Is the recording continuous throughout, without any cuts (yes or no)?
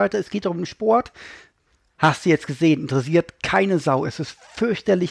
yes